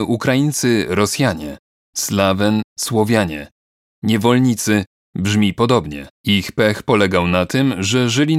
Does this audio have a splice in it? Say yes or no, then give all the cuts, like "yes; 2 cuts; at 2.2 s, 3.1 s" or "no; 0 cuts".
yes; 2 cuts; at 2.7 s, 6.1 s